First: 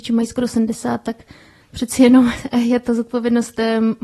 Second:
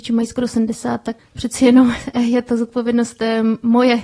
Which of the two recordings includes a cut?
second; 1 cut; at 1.2 s

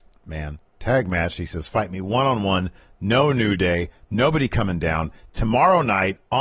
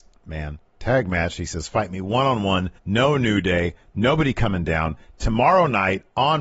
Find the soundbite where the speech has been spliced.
second; 1 cut; at 2.8 s

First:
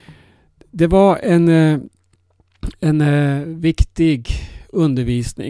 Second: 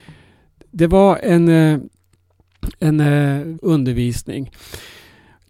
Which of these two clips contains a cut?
second; 1 cut; at 3.6 s

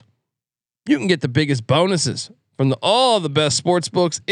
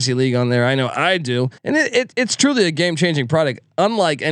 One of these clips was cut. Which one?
second; 1 cut; at 1.6 s

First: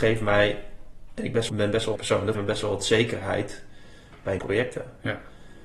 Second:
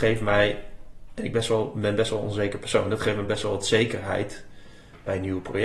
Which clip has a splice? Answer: first; 4 cuts; at 1.5 s, 2.0 s, 2.3 s, 4.4 s

